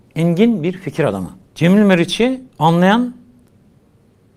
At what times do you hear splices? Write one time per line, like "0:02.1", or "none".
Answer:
0:01.4
0:02.5